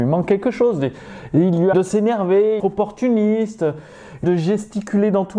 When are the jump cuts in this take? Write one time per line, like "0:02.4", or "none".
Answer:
0:01.7
0:02.6
0:04.2

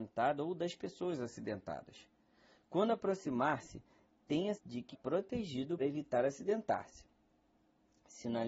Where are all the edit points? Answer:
0:04.6
0:04.9
0:05.8

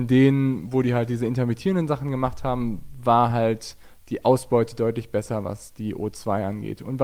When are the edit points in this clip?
none

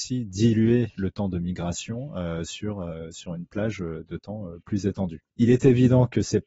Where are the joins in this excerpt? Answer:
0:04.6
0:05.3

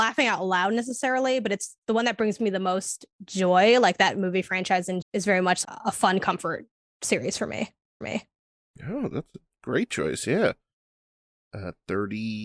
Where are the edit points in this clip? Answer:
0:05.0
0:05.6
0:08.0

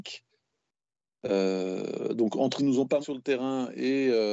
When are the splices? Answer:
0:02.6
0:03.0

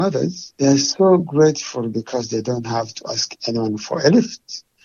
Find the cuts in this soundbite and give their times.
none

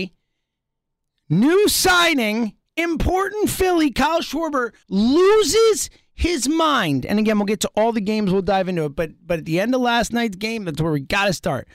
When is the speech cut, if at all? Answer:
0:04.8

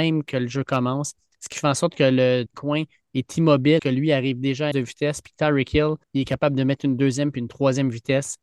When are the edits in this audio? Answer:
0:02.5
0:03.8
0:04.7
0:06.0

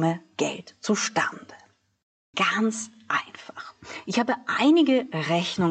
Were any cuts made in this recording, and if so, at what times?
none

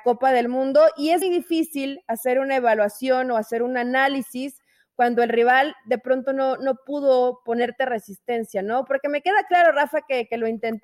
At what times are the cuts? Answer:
0:01.2

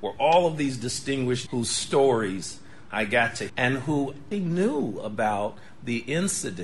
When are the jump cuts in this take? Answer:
0:01.5
0:02.9
0:03.5
0:04.3

